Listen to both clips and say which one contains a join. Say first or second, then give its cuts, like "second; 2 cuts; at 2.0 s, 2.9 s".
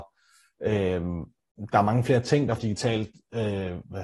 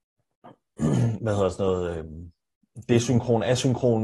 first; 1 cut; at 2.6 s